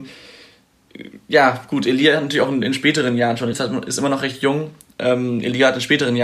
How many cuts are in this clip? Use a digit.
1